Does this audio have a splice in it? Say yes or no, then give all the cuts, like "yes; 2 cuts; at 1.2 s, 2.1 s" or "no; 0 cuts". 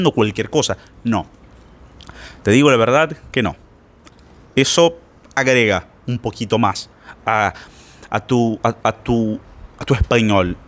no; 0 cuts